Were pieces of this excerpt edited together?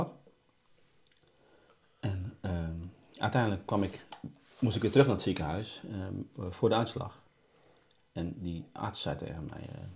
no; 0 cuts

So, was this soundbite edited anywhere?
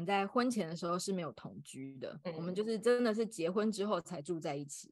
no; 0 cuts

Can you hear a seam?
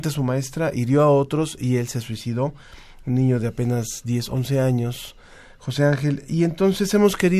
no; 0 cuts

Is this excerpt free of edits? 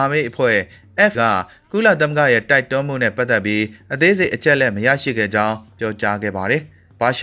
no; 1 cut; at 1.1 s

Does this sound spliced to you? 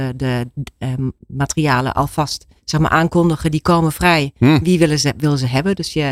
yes; 2 cuts; at 1.2 s, 2.6 s

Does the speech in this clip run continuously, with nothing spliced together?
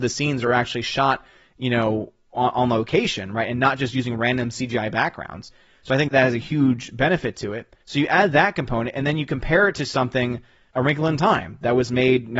no; 3 cuts; at 6.1 s, 7.8 s, 10.7 s

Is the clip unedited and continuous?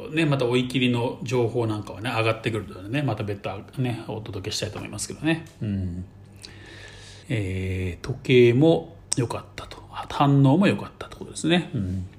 no; 2 cuts; at 7.2 s, 9.0 s

